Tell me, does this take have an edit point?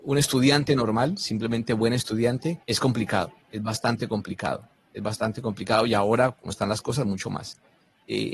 yes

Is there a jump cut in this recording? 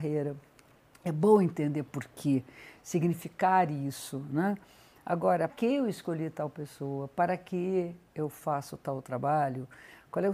yes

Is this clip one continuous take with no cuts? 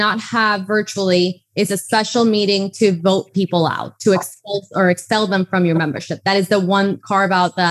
yes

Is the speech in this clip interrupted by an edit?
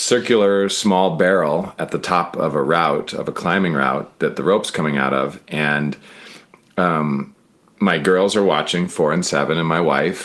no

